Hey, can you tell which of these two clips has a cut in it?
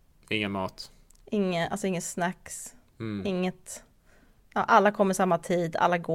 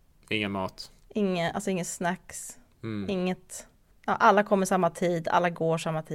second; 2 cuts; at 1.0 s, 3.9 s

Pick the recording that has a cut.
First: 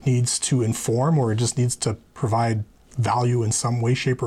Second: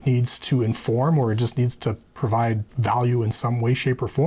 second; 1 cut; at 2.7 s

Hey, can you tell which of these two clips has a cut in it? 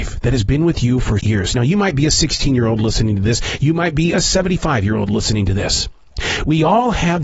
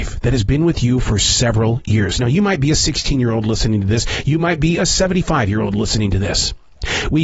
first; 1 cut; at 1.2 s

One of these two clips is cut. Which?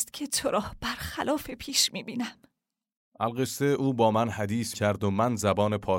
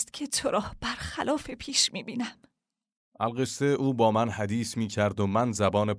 first; 1 cut; at 4.7 s

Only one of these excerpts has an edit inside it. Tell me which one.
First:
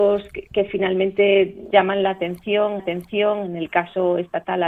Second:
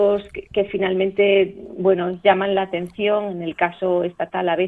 first; 2 cuts; at 1.7 s, 2.8 s

